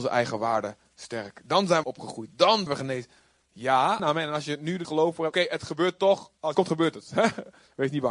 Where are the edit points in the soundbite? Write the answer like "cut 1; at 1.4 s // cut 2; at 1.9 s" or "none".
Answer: cut 1; at 1.8 s // cut 2; at 2.7 s // cut 3; at 4.0 s // cut 4; at 4.8 s // cut 5; at 5.3 s // cut 6; at 6.5 s